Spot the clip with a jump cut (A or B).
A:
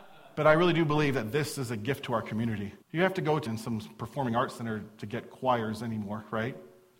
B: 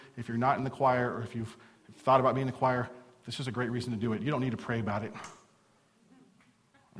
A